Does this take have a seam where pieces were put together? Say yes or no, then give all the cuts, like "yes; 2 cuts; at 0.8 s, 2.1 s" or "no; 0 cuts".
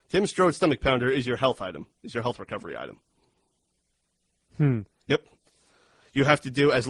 no; 0 cuts